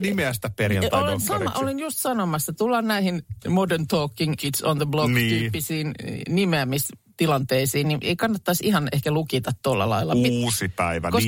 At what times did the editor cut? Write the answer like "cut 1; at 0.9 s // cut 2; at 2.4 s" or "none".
cut 1; at 2.5 s // cut 2; at 4.4 s